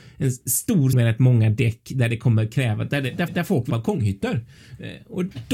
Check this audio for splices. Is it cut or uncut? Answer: cut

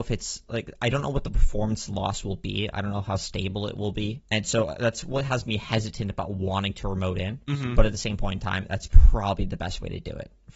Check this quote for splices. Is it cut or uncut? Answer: uncut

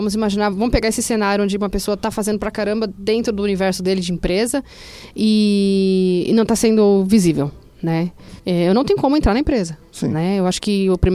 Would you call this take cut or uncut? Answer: cut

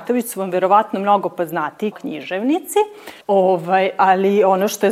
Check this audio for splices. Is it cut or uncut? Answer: cut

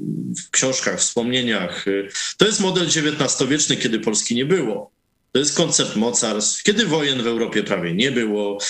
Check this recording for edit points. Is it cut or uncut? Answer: uncut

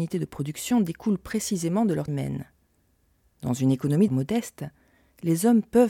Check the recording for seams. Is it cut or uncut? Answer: cut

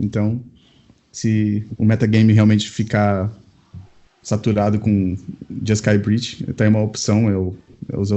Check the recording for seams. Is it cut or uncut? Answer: uncut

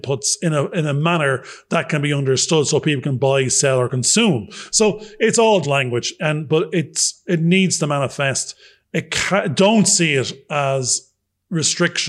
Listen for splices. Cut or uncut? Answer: cut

